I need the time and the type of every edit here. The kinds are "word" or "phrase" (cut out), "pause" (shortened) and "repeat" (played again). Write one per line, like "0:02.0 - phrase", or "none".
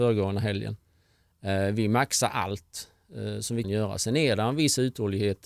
0:03.6 - word